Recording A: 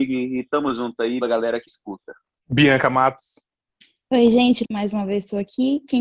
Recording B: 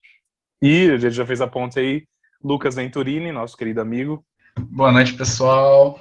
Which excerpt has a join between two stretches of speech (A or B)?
A